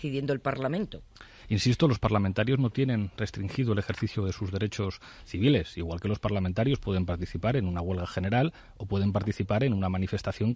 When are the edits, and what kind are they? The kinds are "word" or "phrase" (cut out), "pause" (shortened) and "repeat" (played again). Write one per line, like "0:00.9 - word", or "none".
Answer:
none

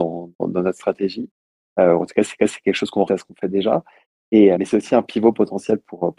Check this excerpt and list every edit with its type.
0:02.4 - repeat
0:03.1 - word
0:04.5 - word

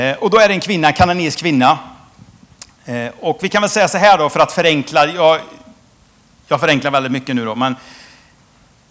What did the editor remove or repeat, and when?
none

